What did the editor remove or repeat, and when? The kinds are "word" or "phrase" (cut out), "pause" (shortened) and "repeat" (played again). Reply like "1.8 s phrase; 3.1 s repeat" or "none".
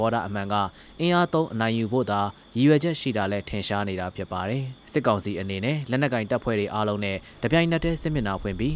4.8 s pause